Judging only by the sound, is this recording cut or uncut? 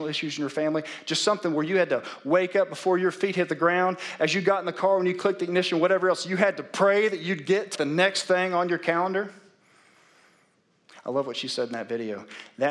cut